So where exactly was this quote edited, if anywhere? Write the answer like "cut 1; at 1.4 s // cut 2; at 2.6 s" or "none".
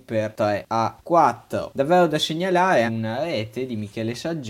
cut 1; at 2.9 s